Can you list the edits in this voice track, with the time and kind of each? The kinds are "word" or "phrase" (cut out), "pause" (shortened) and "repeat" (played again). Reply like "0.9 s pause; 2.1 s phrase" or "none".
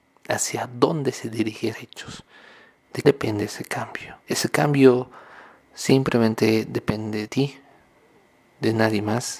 1.7 s word; 3.0 s word; 4.2 s pause; 7.3 s word